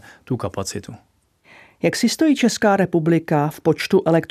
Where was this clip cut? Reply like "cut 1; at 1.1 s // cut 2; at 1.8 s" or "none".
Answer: none